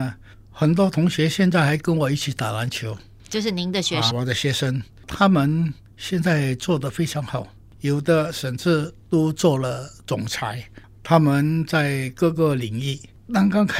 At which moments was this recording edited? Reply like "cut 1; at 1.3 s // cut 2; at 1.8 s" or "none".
cut 1; at 4.1 s